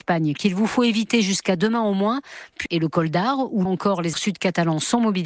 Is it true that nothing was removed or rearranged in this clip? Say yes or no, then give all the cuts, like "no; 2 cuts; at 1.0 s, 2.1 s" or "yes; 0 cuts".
no; 3 cuts; at 2.7 s, 3.7 s, 4.1 s